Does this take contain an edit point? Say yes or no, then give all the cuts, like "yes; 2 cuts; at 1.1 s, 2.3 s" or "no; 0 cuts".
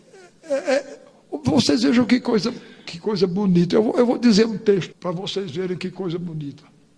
yes; 1 cut; at 4.9 s